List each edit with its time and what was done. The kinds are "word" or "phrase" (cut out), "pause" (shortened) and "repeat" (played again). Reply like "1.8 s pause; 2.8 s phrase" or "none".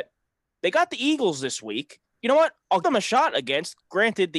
2.2 s word; 2.8 s word